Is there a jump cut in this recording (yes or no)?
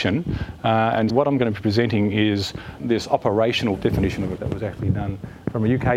yes